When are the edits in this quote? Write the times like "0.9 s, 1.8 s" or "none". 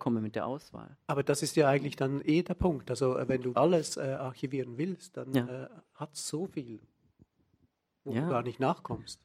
3.5 s